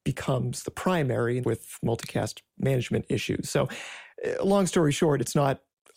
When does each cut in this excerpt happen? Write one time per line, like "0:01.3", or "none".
0:01.4